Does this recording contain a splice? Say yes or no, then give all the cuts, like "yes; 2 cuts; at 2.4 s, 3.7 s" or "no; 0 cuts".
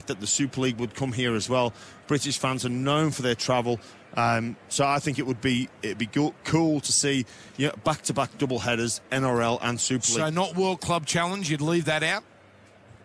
no; 0 cuts